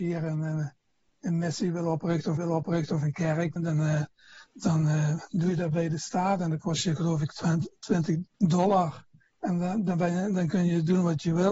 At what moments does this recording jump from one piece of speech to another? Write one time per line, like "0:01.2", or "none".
0:02.4
0:03.6
0:08.3